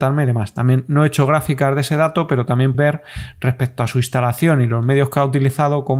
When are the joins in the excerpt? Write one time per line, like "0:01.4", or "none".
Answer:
0:02.7